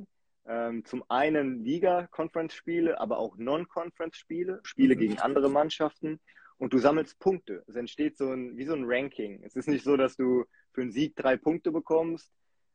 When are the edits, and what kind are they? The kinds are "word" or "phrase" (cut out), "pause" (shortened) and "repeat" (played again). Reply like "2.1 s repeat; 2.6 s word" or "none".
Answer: 4.6 s word